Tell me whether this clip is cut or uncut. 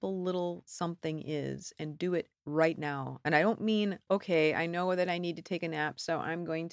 cut